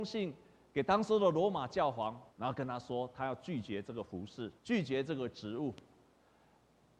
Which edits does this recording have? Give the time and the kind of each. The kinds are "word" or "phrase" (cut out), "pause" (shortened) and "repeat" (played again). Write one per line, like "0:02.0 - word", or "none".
0:02.3 - pause
0:04.6 - pause